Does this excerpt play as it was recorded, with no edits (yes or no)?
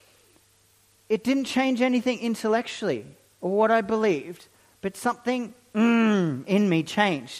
yes